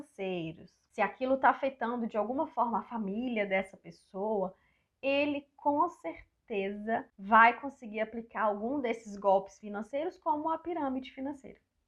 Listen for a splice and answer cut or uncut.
uncut